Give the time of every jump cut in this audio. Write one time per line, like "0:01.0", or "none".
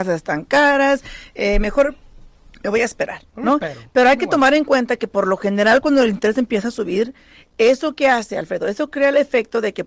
none